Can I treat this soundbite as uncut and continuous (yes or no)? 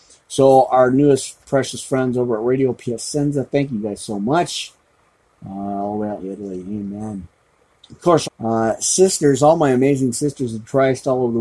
no